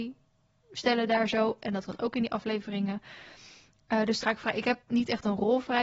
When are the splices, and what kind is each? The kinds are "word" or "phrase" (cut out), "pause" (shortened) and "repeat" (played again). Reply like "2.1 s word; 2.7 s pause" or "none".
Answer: 1.9 s word; 4.2 s word; 4.8 s word